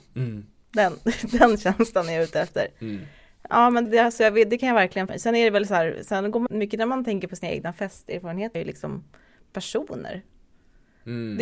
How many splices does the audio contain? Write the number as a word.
four